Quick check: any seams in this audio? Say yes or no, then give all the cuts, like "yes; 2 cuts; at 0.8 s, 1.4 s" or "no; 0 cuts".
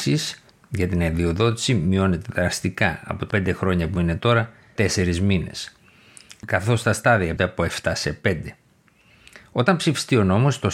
yes; 3 cuts; at 3.3 s, 4.8 s, 7.4 s